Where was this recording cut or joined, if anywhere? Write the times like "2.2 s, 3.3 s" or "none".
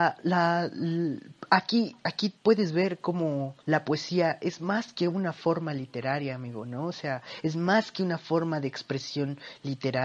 2.4 s, 3.6 s